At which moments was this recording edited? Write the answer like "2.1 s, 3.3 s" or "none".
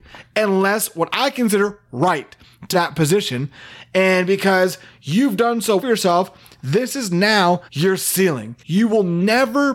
2.7 s, 5.8 s, 7.7 s, 8.6 s